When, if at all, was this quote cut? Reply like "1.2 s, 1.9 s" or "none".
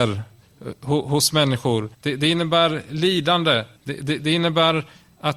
1.9 s, 3.8 s